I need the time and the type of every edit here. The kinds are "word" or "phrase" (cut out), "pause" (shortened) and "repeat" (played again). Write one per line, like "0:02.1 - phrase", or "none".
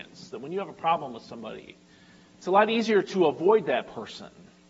0:01.9 - pause